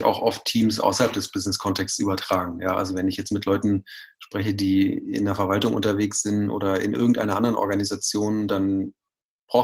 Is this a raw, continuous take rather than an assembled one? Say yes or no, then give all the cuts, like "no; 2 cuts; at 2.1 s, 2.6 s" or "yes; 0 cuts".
yes; 0 cuts